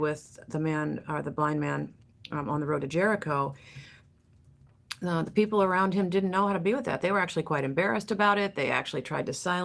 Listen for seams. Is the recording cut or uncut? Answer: uncut